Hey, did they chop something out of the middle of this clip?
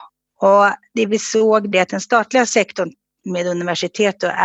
yes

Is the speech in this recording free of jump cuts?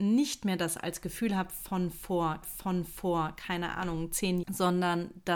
no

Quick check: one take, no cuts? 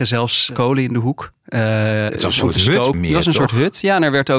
no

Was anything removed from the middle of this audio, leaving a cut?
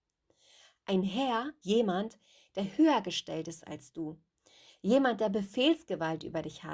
yes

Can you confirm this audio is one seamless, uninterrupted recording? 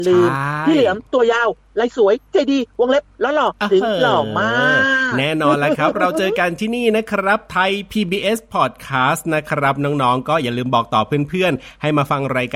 yes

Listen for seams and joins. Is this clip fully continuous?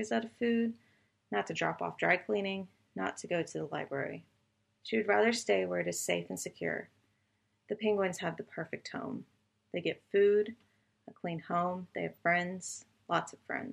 yes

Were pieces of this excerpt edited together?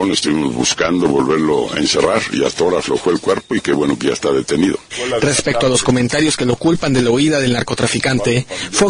no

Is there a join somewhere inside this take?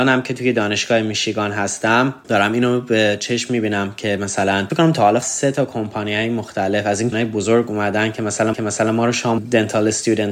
yes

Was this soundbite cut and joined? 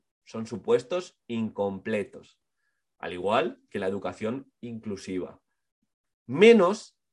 no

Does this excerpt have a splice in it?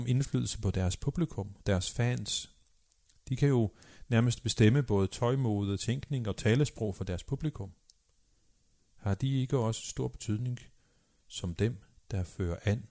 no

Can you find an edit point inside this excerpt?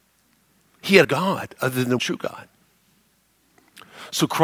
yes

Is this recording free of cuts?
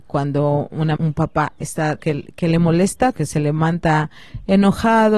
no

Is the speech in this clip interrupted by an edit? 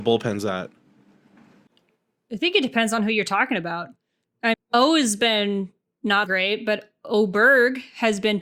yes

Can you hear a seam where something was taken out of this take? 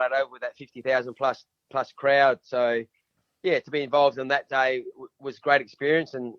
no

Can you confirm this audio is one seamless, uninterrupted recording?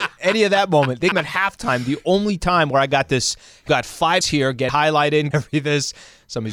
no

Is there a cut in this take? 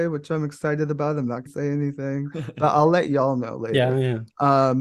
yes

